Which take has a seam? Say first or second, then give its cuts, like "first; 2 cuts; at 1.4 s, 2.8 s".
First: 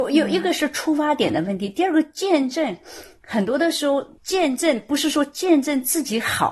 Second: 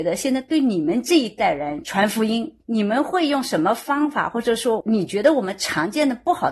second; 1 cut; at 2.6 s